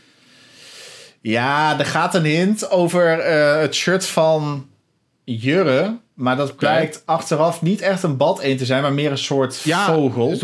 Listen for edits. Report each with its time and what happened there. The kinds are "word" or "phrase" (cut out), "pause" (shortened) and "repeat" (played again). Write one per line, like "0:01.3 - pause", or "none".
none